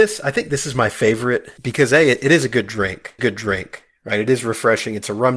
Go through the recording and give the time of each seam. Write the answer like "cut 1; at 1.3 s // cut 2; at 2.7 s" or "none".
cut 1; at 3.2 s